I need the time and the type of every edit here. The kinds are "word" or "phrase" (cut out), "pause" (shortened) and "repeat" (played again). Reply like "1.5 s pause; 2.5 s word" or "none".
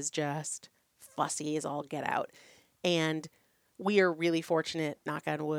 none